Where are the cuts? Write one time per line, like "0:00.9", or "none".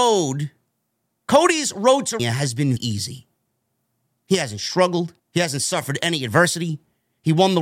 0:02.2
0:02.8
0:05.2